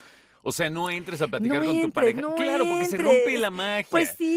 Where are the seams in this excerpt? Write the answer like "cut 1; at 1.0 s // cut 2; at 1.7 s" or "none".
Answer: none